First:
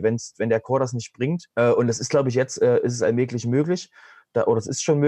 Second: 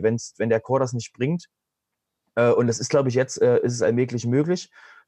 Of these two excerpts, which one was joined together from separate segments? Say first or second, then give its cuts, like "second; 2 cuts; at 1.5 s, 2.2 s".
first; 1 cut; at 1.5 s